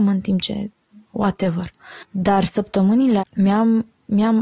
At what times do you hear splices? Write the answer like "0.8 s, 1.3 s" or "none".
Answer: 3.2 s